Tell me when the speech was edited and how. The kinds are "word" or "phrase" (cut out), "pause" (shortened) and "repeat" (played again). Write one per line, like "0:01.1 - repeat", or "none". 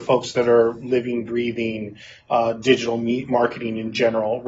none